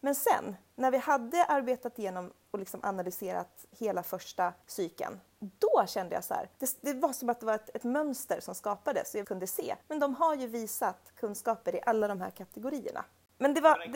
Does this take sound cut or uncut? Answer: cut